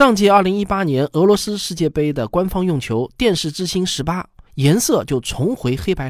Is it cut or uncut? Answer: cut